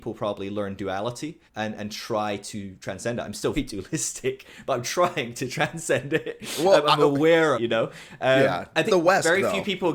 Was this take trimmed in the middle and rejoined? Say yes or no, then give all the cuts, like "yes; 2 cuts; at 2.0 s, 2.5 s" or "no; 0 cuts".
yes; 4 cuts; at 1.5 s, 3.5 s, 7.5 s, 8.8 s